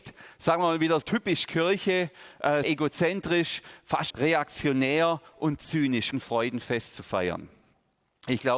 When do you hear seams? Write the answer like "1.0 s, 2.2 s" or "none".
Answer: 1.0 s, 2.6 s, 4.1 s, 6.1 s